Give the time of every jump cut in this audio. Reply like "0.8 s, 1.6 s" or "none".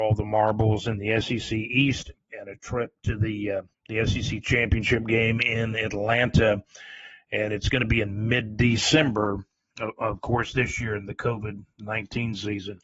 3.7 s